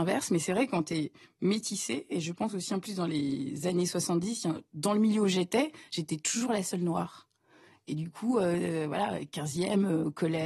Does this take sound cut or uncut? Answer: uncut